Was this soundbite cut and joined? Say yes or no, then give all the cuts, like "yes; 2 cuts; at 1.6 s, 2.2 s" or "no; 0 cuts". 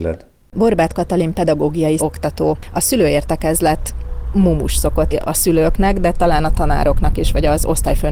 yes; 2 cuts; at 2.0 s, 5.1 s